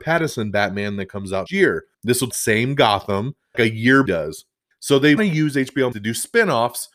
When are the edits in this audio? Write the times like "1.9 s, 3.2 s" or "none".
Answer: 1.5 s, 1.9 s, 2.3 s, 3.5 s, 4.1 s, 4.7 s, 5.2 s, 5.9 s